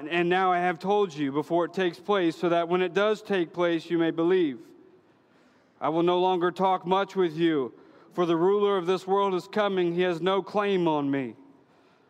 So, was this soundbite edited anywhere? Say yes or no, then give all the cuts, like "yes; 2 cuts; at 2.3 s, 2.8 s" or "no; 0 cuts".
no; 0 cuts